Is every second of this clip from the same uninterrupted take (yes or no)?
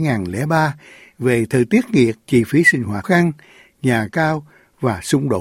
no